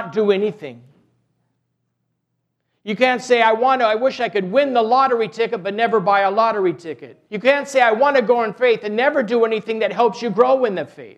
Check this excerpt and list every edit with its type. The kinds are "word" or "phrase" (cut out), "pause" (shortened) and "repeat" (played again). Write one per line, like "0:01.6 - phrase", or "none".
0:07.3 - pause